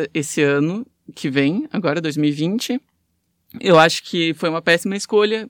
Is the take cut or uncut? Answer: uncut